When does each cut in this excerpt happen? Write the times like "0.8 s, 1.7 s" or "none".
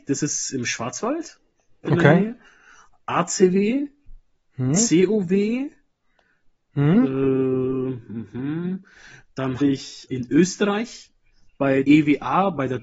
1.8 s, 4.3 s, 8.3 s, 9.6 s, 10.1 s, 11.8 s